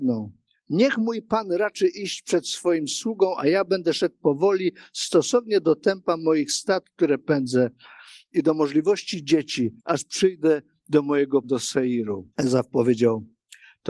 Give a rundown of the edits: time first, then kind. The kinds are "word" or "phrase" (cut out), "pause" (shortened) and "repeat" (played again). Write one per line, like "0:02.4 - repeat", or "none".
0:09.8 - pause
0:11.4 - word
0:12.3 - pause